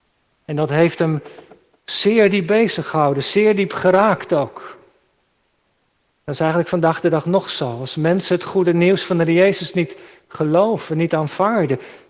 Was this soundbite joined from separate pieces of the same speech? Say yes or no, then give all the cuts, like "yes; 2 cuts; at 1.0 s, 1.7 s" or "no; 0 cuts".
no; 0 cuts